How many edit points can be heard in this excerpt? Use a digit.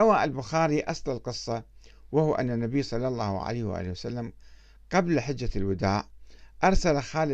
0